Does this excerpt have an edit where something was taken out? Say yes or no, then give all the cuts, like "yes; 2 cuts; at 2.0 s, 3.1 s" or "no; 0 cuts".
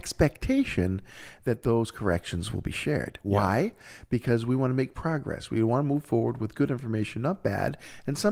no; 0 cuts